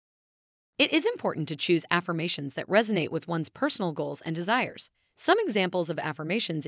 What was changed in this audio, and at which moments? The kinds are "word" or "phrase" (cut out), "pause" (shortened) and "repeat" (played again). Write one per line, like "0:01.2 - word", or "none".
0:04.9 - pause